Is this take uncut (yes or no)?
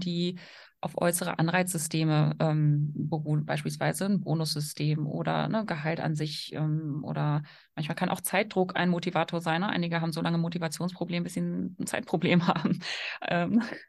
yes